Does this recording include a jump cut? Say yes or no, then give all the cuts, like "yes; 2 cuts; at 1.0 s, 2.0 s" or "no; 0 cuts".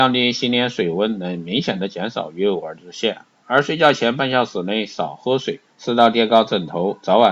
yes; 1 cut; at 5.7 s